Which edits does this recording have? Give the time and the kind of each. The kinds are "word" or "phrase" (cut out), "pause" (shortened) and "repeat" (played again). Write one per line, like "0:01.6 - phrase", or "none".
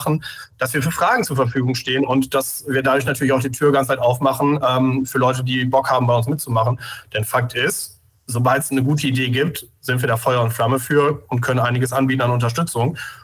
none